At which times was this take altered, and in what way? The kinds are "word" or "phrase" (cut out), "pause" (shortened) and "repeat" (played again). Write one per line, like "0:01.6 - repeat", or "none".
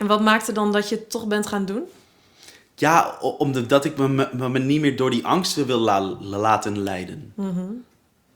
none